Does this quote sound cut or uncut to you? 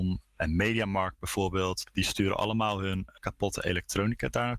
uncut